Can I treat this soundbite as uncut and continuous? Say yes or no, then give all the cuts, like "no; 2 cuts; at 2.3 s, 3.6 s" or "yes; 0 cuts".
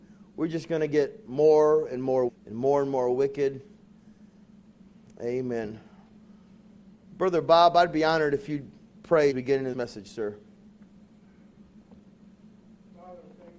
no; 3 cuts; at 2.3 s, 9.3 s, 9.7 s